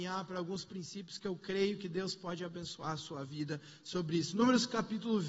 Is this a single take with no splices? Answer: yes; 0 cuts

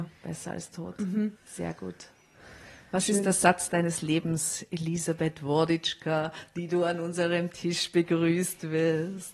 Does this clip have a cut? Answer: yes; 1 cut; at 1.4 s

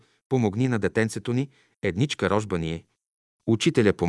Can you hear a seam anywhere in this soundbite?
no; 0 cuts

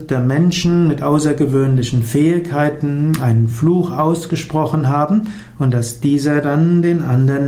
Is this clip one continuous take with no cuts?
yes; 0 cuts

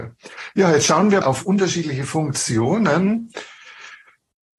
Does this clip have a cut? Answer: yes; 1 cut; at 1.2 s

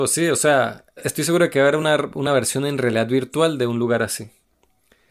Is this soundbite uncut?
yes; 0 cuts

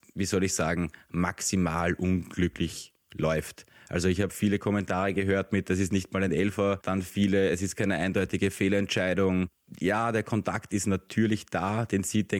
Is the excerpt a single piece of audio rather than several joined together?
yes; 0 cuts

